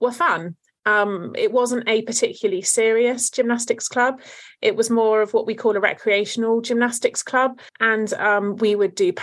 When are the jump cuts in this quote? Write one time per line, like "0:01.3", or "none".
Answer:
0:07.7